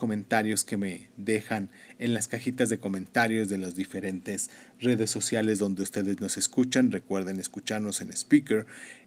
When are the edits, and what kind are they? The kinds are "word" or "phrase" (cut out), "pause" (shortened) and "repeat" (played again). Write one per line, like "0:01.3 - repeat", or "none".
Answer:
none